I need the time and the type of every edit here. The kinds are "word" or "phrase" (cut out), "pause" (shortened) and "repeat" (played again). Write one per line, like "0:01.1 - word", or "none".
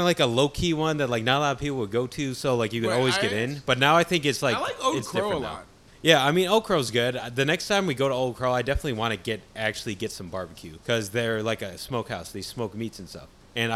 0:05.9 - pause
0:10.8 - pause

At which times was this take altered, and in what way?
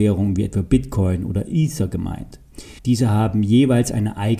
0:02.8 - pause

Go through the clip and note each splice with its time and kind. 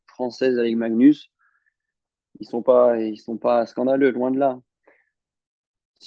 none

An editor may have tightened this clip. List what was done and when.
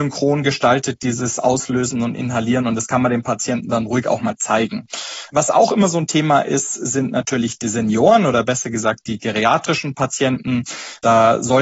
none

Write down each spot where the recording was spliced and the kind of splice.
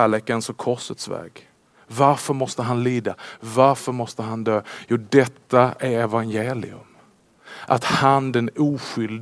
none

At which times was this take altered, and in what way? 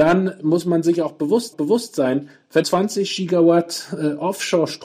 0:01.5 - repeat
0:02.6 - word

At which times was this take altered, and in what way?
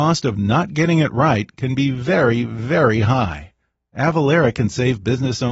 none

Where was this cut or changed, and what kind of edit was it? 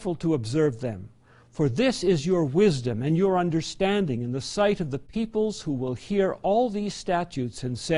none

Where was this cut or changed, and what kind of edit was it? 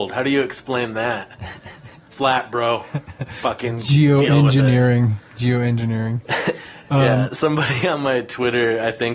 0:02.1 - phrase

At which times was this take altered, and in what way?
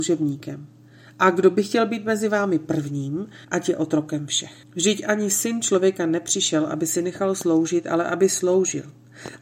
0:03.4 - pause
0:04.6 - pause

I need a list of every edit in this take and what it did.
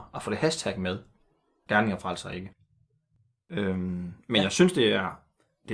0:01.7 - phrase

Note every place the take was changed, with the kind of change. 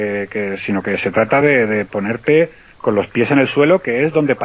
none

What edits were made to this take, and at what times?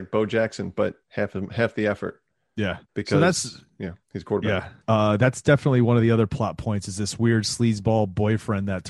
0:01.0 - pause
0:02.8 - pause
0:04.0 - pause
0:04.8 - pause

